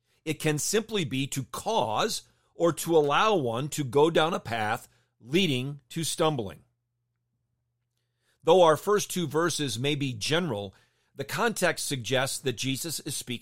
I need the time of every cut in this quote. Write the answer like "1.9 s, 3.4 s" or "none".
none